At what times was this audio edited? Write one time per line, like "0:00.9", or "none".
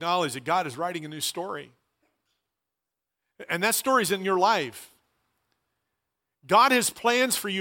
none